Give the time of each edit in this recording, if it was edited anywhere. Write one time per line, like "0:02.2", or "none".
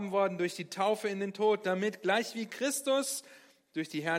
none